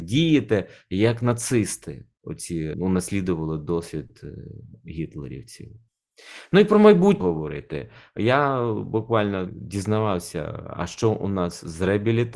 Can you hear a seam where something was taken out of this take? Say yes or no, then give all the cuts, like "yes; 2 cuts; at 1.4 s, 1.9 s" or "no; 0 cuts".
yes; 3 cuts; at 2.7 s, 7.2 s, 9.5 s